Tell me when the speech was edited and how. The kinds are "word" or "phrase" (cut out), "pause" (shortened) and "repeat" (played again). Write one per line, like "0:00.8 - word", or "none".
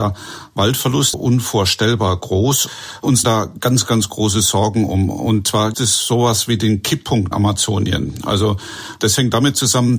0:01.1 - word
0:03.2 - word
0:05.7 - word
0:07.3 - word